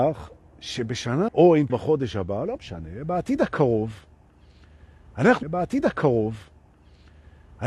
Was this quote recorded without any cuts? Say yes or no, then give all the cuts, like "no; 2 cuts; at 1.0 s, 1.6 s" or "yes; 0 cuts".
no; 3 cuts; at 1.3 s, 1.7 s, 5.4 s